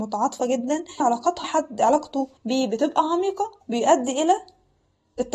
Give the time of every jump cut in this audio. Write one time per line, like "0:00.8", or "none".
0:01.0
0:01.4
0:02.4
0:03.6